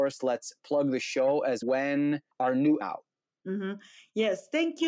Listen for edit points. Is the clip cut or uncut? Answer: cut